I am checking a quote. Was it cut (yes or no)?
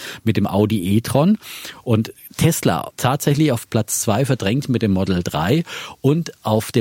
yes